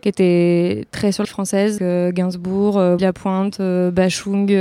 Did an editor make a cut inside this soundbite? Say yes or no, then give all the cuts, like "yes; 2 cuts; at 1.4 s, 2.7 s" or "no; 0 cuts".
yes; 3 cuts; at 1.2 s, 1.8 s, 3.0 s